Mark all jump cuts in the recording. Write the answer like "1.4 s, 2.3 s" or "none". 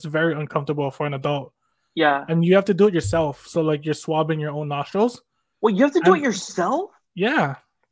none